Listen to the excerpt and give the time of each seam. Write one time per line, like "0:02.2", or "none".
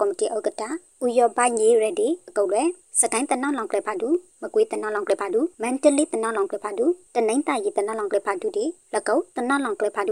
0:05.5